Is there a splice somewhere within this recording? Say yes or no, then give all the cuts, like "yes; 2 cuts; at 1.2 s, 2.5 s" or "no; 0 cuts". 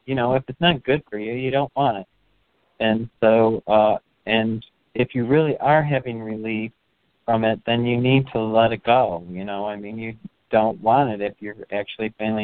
no; 0 cuts